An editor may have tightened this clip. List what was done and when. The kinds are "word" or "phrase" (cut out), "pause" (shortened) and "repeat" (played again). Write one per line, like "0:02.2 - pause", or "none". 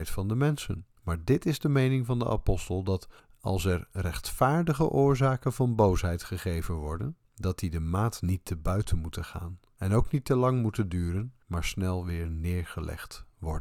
0:01.0 - pause
0:03.2 - pause
0:07.2 - pause
0:11.4 - pause